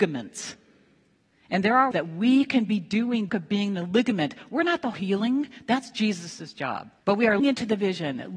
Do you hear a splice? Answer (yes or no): yes